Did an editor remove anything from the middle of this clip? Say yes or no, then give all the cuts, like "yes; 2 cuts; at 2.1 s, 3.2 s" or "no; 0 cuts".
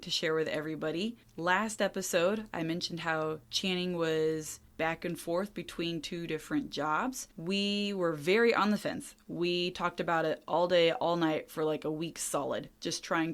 yes; 4 cuts; at 1.2 s, 3.4 s, 4.7 s, 7.3 s